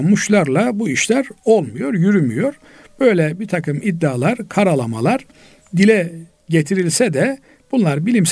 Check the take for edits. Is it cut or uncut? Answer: uncut